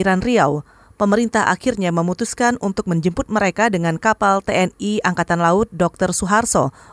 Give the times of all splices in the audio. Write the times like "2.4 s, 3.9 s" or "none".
none